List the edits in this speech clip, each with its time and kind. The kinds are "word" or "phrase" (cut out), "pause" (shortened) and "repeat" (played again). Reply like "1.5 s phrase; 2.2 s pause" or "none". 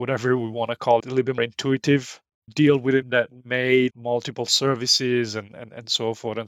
1.0 s phrase; 1.4 s word; 2.5 s word; 3.0 s word; 3.9 s word